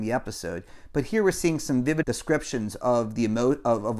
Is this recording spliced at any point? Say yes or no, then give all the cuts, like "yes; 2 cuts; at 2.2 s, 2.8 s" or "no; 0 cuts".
yes; 1 cut; at 2.0 s